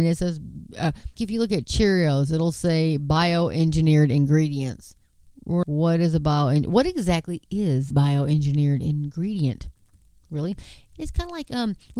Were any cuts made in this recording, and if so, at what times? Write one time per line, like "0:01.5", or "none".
0:01.2
0:05.6
0:07.9